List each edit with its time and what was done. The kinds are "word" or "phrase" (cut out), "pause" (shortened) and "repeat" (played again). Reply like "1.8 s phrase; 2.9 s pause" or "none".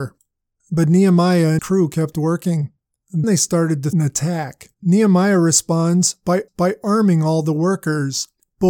1.6 s word; 3.2 s word; 3.9 s word; 4.7 s pause; 6.5 s repeat